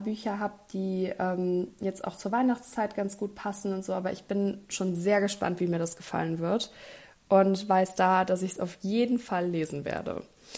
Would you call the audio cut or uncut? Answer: uncut